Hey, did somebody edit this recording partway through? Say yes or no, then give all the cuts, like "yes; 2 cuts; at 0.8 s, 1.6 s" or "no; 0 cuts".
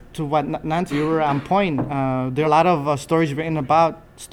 yes; 2 cuts; at 0.9 s, 2.4 s